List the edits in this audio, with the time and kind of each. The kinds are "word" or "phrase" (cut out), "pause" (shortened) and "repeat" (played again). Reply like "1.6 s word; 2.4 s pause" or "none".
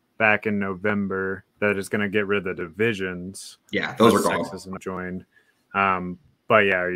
1.5 s pause; 4.8 s word